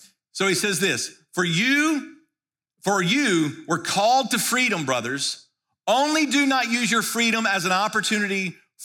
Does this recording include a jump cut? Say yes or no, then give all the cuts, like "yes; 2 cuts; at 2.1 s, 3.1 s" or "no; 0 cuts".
no; 0 cuts